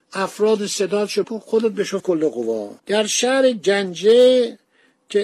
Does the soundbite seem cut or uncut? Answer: cut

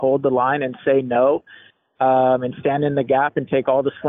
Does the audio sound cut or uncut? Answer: uncut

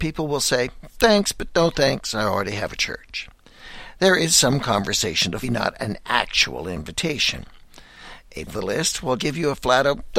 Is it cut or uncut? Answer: cut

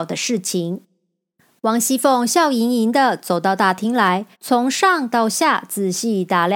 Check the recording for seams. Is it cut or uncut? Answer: cut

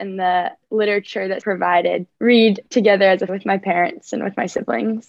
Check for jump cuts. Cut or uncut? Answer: cut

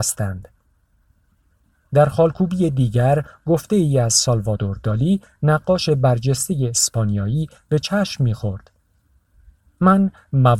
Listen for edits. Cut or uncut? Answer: uncut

